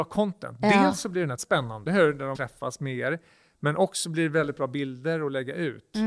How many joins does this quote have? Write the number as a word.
three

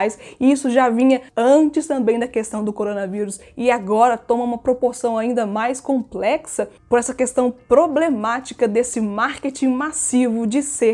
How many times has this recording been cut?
one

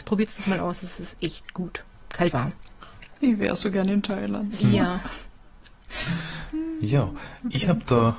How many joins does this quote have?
one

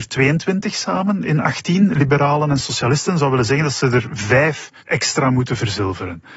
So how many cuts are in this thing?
one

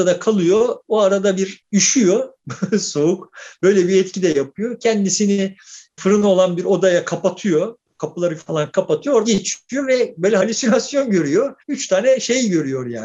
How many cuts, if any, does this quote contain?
four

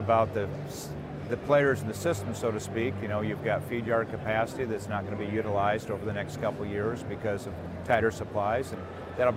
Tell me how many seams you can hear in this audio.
zero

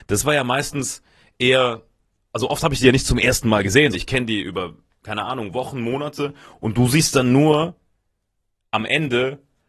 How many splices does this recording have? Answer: one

